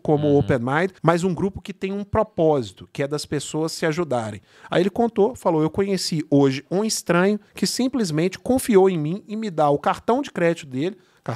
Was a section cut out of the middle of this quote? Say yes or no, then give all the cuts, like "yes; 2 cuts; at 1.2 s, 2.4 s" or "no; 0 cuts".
yes; 2 cuts; at 1.0 s, 7.5 s